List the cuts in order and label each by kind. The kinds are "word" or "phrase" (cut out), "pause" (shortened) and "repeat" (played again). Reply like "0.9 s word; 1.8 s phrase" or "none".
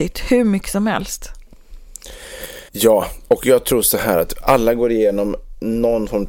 2.7 s pause